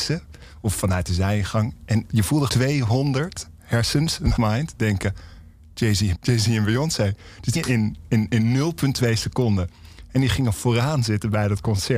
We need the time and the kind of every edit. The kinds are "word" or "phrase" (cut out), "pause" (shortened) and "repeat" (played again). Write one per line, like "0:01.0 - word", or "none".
0:02.1 - word
0:02.5 - word
0:04.4 - word
0:06.1 - word
0:07.6 - word